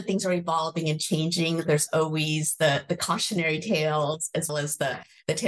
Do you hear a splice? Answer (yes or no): yes